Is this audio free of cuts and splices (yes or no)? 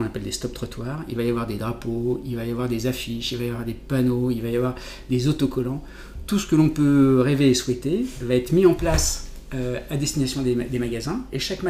yes